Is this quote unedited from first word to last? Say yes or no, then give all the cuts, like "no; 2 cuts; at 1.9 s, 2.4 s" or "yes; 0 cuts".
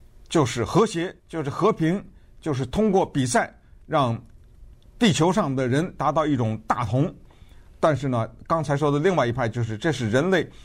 no; 1 cut; at 1.2 s